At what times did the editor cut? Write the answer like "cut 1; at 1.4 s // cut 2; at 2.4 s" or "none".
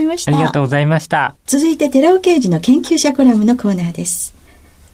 cut 1; at 1.4 s